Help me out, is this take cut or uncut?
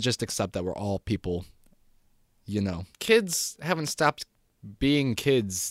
cut